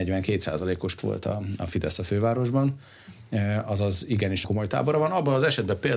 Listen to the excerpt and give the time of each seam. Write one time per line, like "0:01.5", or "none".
0:01.0
0:04.4